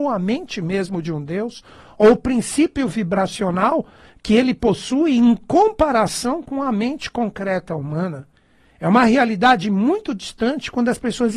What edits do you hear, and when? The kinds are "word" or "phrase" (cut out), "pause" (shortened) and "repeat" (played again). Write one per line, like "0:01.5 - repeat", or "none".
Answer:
none